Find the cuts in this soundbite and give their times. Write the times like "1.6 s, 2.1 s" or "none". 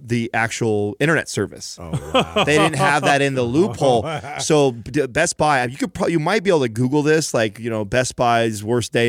none